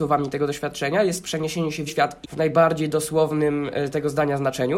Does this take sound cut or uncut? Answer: cut